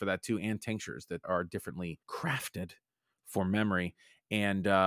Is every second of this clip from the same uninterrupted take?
no; 2 cuts; at 1.2 s, 2.0 s

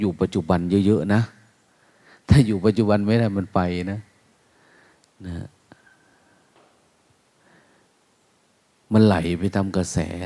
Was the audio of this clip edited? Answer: no; 0 cuts

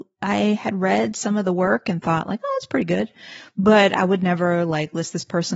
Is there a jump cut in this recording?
no; 0 cuts

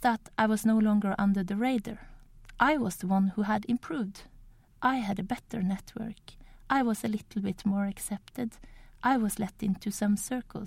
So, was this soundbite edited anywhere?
no; 0 cuts

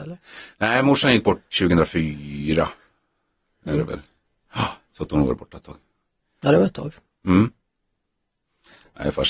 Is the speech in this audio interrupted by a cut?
no; 0 cuts

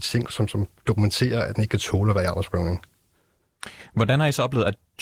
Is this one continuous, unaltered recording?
no; 1 cut; at 1.5 s

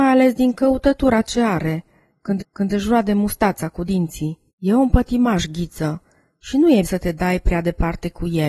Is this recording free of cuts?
no; 3 cuts; at 2.4 s, 4.5 s, 6.8 s

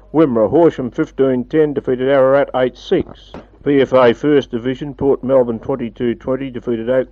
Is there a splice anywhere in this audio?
no; 0 cuts

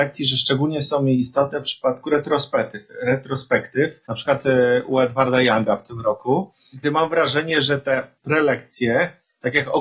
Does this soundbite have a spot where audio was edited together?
yes; 3 cuts; at 4.0 s, 6.8 s, 8.2 s

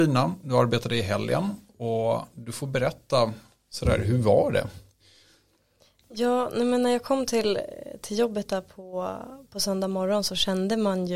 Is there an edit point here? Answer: no; 0 cuts

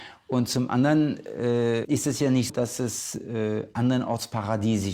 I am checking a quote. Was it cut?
yes; 2 cuts; at 1.8 s, 2.5 s

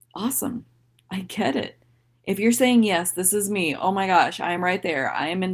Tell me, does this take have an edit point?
no; 0 cuts

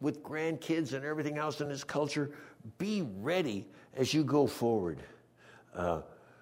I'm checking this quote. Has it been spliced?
no; 0 cuts

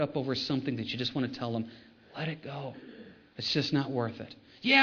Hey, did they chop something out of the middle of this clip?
no; 0 cuts

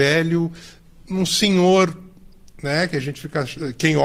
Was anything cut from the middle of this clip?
no; 0 cuts

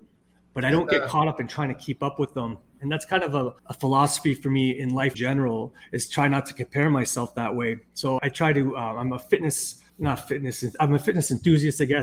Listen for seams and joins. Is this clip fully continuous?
no; 4 cuts; at 3.6 s, 5.1 s, 8.2 s, 9.9 s

